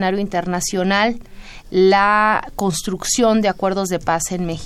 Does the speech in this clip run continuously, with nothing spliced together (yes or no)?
yes